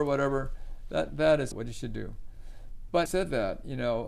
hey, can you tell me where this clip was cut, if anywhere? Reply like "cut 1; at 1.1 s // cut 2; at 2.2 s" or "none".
cut 1; at 1.1 s // cut 2; at 1.5 s // cut 3; at 3.1 s